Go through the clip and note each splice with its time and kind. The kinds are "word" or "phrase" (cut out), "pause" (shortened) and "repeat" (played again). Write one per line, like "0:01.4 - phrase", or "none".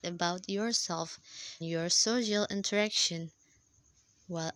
0:01.6 - word